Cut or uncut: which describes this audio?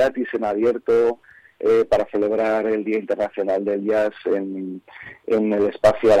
uncut